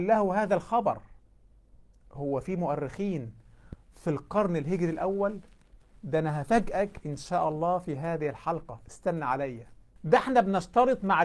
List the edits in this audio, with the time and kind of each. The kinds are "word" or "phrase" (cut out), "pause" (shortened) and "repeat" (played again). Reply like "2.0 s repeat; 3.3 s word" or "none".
none